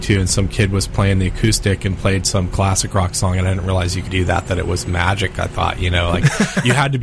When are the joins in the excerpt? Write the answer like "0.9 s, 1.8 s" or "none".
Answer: 4.1 s